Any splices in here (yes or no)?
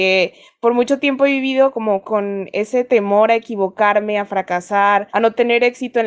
yes